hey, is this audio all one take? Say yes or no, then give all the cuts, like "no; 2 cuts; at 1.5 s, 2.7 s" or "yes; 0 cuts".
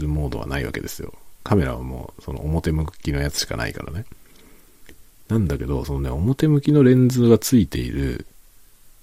yes; 0 cuts